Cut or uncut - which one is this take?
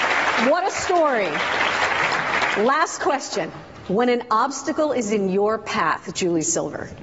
uncut